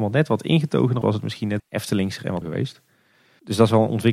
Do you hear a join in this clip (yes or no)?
yes